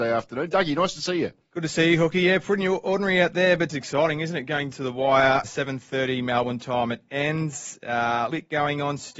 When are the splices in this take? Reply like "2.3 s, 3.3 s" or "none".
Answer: 3.7 s, 4.7 s, 5.4 s, 8.3 s